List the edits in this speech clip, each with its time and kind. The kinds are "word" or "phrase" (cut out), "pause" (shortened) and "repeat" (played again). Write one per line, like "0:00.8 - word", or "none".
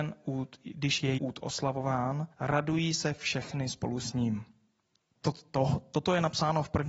0:01.2 - word
0:02.3 - pause
0:05.0 - pause